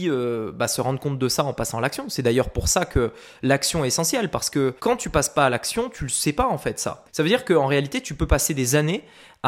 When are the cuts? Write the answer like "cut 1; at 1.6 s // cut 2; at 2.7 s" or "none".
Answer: cut 1; at 4.8 s // cut 2; at 7.1 s

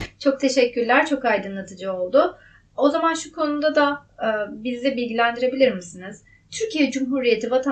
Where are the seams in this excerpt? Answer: none

